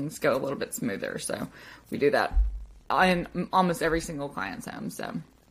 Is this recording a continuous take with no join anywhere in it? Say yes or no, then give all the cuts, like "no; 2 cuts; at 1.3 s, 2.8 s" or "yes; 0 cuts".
yes; 0 cuts